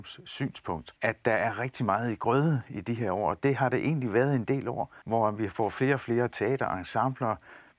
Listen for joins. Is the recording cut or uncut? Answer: cut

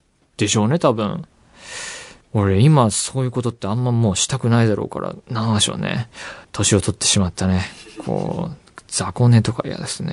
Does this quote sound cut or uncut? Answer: cut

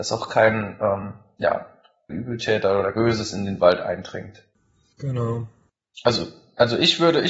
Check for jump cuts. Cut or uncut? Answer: cut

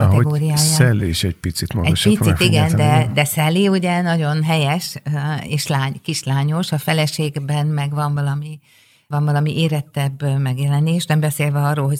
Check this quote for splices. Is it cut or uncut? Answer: uncut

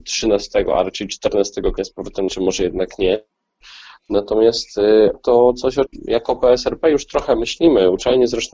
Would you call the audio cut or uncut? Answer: cut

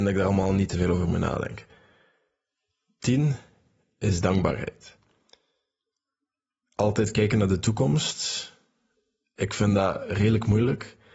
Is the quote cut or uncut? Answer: uncut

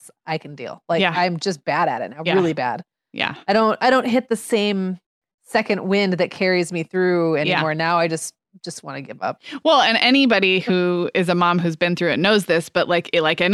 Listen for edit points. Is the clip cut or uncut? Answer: uncut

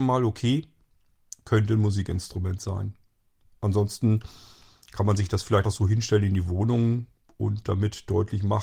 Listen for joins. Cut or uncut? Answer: cut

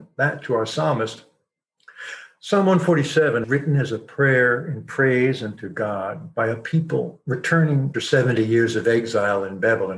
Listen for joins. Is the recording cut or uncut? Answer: cut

